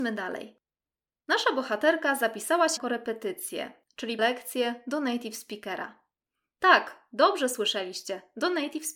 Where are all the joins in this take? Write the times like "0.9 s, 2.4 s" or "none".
2.8 s, 4.2 s